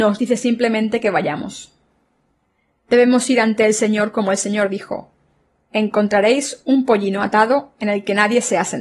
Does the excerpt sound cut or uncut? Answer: uncut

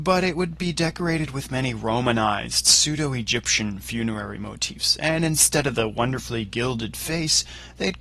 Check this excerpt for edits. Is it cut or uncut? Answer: uncut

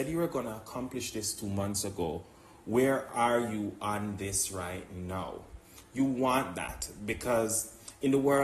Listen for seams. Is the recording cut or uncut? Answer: uncut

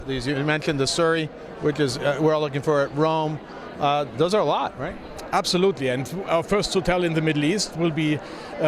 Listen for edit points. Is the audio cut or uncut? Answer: uncut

